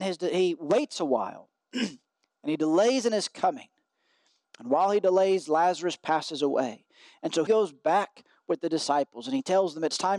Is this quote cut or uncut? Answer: cut